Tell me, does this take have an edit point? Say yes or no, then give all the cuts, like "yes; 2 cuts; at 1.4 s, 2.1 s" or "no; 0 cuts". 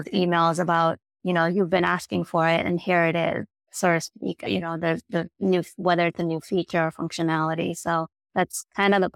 no; 0 cuts